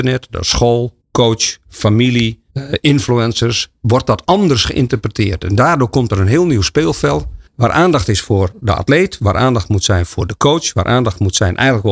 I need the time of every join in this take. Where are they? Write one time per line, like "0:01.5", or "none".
0:01.0
0:02.5
0:07.5